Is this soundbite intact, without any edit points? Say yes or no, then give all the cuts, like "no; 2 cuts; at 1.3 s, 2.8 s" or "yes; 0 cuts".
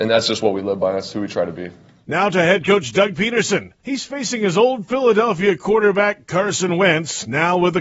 yes; 0 cuts